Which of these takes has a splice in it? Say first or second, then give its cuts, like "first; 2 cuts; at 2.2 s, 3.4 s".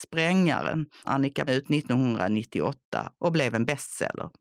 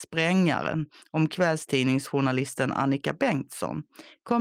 first; 2 cuts; at 1.0 s, 1.5 s